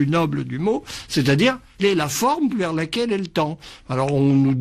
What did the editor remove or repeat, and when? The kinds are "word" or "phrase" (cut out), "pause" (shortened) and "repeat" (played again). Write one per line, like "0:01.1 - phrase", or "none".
0:01.8 - word
0:02.5 - word